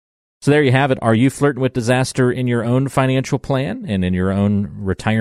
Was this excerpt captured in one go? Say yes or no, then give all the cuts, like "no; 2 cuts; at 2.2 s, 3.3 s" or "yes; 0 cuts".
yes; 0 cuts